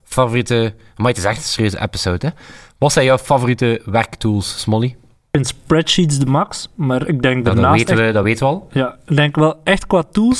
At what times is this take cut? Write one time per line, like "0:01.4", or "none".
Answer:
none